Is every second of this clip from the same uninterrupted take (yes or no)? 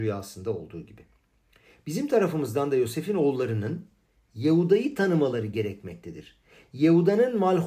yes